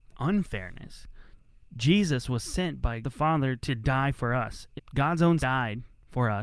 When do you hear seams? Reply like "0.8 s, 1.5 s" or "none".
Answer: 3.0 s, 4.8 s, 5.4 s